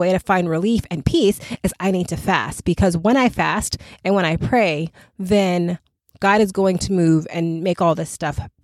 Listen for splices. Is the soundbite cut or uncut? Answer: uncut